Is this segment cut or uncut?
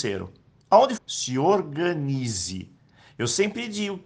cut